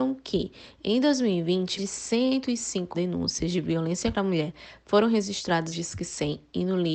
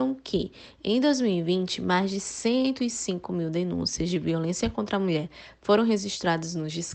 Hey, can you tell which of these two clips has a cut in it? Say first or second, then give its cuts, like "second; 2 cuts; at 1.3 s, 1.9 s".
first; 4 cuts; at 1.8 s, 2.9 s, 4.1 s, 5.7 s